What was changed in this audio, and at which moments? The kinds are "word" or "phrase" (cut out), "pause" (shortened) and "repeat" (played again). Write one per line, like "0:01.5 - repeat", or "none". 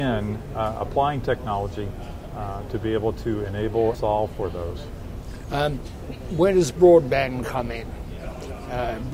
0:03.9 - word